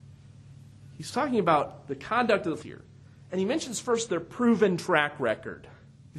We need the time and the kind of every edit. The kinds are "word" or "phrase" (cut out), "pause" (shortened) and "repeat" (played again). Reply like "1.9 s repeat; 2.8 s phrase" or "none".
2.6 s word